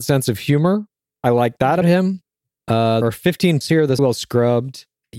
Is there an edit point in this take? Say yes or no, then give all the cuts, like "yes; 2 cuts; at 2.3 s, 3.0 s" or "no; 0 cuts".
yes; 4 cuts; at 1.8 s, 3.0 s, 3.6 s, 4.0 s